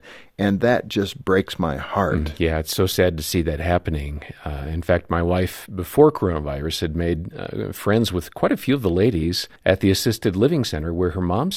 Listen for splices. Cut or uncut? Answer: cut